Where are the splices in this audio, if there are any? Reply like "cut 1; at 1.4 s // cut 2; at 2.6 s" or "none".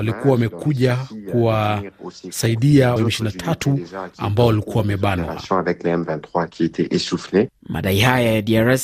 cut 1; at 3.0 s